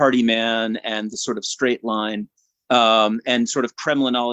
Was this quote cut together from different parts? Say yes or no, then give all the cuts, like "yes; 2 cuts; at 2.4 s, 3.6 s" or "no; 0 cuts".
no; 0 cuts